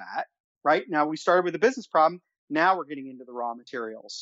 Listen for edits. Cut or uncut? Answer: uncut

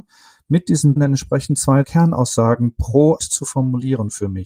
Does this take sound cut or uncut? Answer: cut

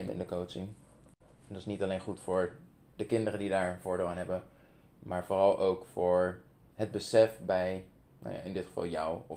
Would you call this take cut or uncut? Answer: uncut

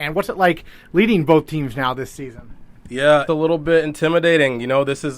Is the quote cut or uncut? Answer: cut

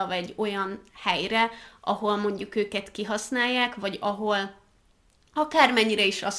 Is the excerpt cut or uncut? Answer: uncut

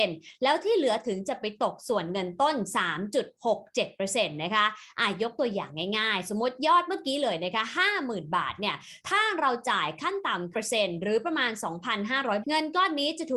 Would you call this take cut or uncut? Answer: cut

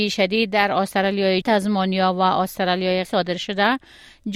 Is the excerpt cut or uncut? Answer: cut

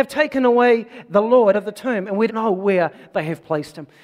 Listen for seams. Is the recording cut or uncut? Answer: cut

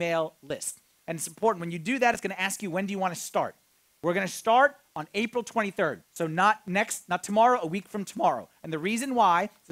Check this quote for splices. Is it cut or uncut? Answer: cut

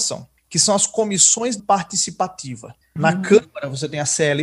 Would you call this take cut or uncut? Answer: cut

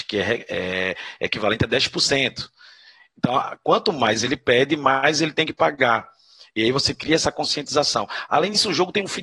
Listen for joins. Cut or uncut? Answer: uncut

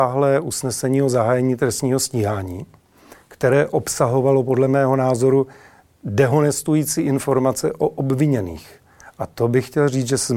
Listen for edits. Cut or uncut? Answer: uncut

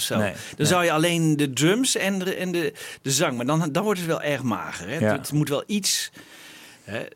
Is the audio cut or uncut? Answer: uncut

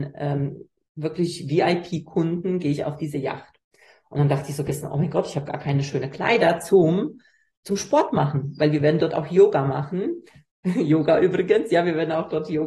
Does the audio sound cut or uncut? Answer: uncut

